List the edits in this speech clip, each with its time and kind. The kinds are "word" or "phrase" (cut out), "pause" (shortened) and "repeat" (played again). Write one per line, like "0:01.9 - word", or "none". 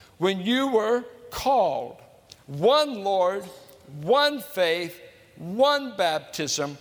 none